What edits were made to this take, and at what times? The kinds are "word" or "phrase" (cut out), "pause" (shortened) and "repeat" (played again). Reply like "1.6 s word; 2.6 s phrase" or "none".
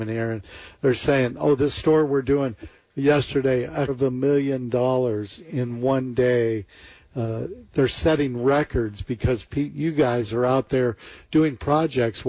3.9 s word